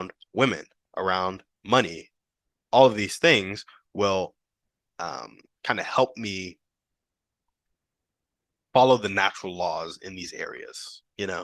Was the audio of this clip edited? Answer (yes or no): no